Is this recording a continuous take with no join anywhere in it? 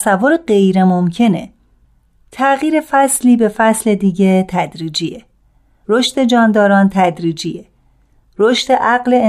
yes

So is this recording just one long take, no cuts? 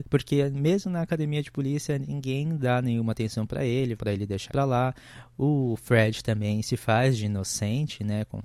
no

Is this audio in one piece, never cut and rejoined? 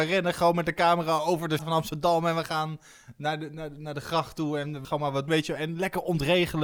no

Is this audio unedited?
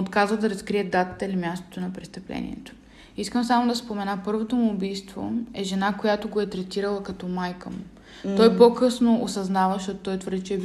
yes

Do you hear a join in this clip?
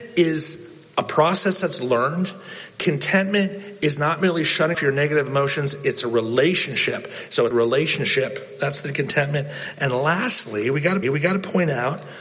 yes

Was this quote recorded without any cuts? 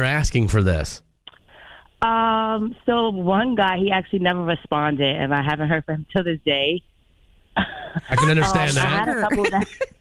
yes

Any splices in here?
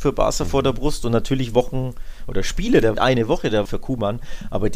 yes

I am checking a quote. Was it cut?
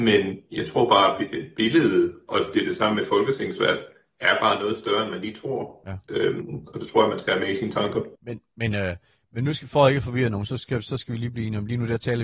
yes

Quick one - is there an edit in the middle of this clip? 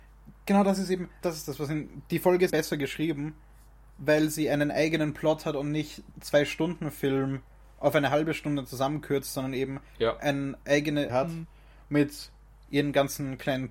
yes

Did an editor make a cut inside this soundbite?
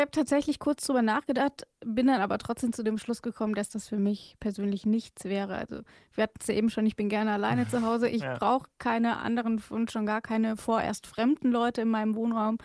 no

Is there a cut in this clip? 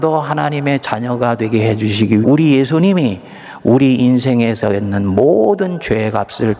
yes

